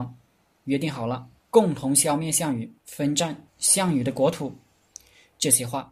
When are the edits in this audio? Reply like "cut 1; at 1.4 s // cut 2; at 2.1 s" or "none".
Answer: cut 1; at 1.4 s // cut 2; at 2.8 s // cut 3; at 3.5 s